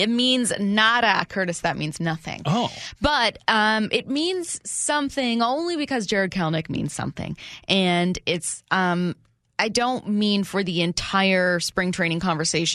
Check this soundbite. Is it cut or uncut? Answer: uncut